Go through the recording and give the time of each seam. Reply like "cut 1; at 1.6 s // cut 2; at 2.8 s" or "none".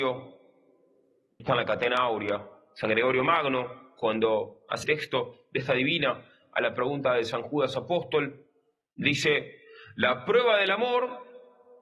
cut 1; at 1.4 s // cut 2; at 4.8 s // cut 3; at 5.6 s